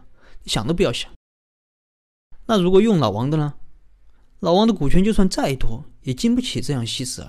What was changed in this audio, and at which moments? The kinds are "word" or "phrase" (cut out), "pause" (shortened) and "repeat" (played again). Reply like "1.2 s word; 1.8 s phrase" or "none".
4.2 s pause